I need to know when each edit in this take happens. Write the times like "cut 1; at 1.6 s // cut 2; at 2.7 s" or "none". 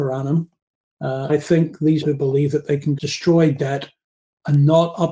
cut 1; at 1.3 s // cut 2; at 2.0 s // cut 3; at 3.0 s